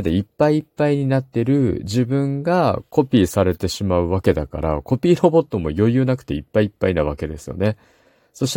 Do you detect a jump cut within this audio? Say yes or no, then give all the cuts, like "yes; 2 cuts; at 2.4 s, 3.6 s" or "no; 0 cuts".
no; 0 cuts